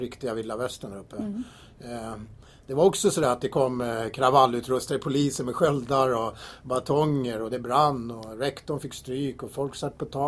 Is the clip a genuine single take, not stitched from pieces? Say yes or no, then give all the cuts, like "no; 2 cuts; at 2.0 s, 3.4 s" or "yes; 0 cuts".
yes; 0 cuts